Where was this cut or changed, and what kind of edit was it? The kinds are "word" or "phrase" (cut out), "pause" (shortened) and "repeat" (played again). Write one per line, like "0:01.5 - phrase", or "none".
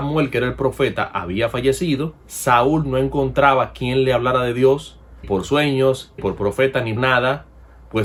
0:02.2 - pause
0:05.2 - word
0:06.2 - word
0:07.0 - word